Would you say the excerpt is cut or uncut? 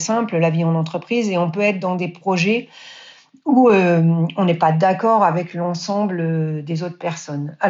uncut